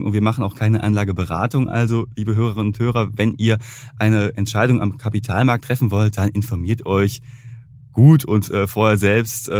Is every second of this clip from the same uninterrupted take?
yes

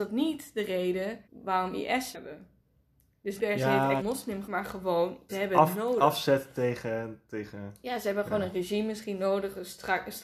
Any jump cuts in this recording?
yes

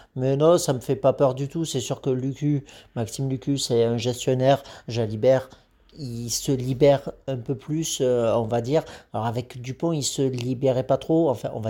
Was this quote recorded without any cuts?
yes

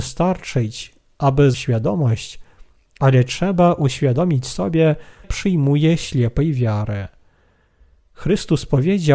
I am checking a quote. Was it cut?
yes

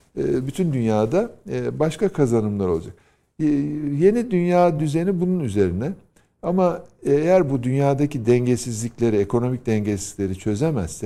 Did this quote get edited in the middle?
no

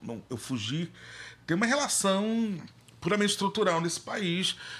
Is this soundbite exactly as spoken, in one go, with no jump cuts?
yes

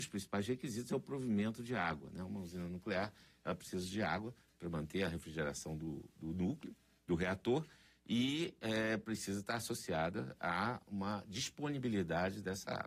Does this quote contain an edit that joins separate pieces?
no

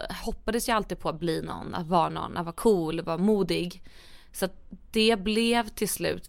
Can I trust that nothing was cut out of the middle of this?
yes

